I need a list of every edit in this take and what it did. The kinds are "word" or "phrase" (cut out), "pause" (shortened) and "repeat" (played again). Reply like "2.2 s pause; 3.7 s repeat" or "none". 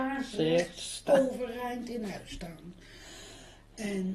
none